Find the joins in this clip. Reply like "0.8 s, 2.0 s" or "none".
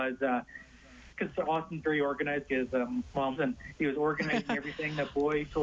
1.1 s, 2.5 s, 3.4 s